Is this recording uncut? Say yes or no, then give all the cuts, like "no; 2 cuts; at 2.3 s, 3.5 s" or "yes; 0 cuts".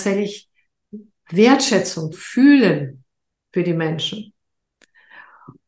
no; 1 cut; at 2.1 s